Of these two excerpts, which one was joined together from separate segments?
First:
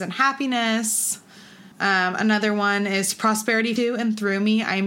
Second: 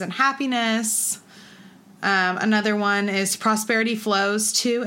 first; 2 cuts; at 1.7 s, 3.8 s

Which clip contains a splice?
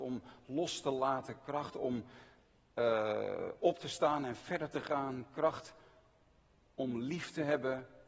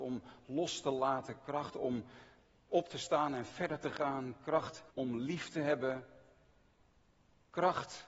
second; 2 cuts; at 2.7 s, 4.9 s

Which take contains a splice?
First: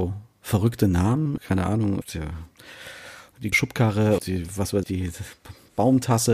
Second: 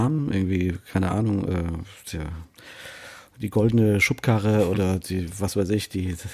first; 5 cuts; at 1.4 s, 2.0 s, 3.5 s, 4.2 s, 4.8 s

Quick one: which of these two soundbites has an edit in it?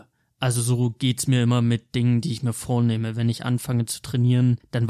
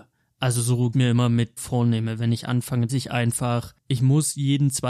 second; 3 cuts; at 0.9 s, 1.6 s, 2.9 s

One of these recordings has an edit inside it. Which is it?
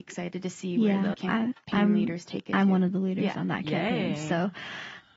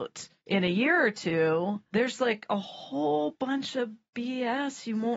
first; 1 cut; at 1.1 s

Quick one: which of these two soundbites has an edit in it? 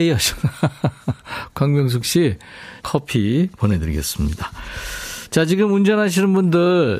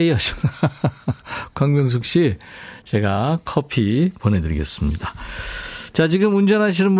first; 1 cut; at 2.8 s

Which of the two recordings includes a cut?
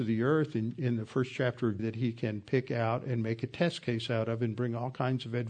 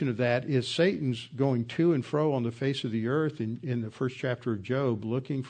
first; 1 cut; at 1.8 s

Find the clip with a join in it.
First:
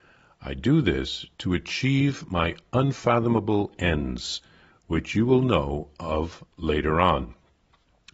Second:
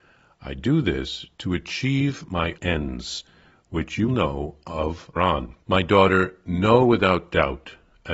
second; 4 cuts; at 2.6 s, 4.1 s, 5.2 s, 5.6 s

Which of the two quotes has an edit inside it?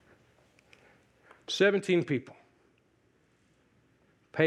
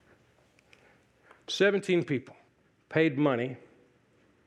second; 1 cut; at 2.5 s

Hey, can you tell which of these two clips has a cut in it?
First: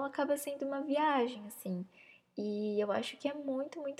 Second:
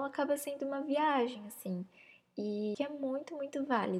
second; 1 cut; at 2.7 s

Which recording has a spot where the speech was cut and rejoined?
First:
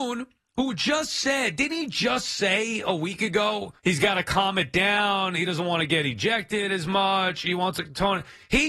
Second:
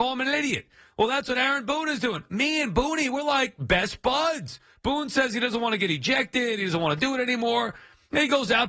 first; 1 cut; at 3.8 s

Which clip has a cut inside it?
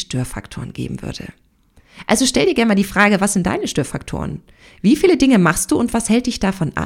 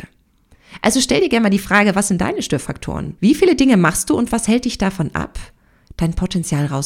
second; 1 cut; at 3.2 s

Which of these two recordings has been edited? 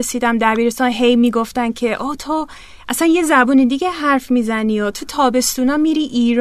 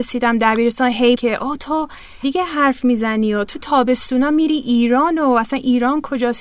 second; 2 cuts; at 1.1 s, 2.2 s

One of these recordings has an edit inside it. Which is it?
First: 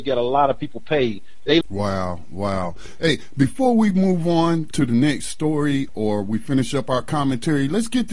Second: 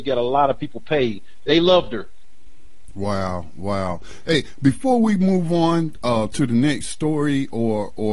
first; 3 cuts; at 1.6 s, 4.7 s, 5.9 s

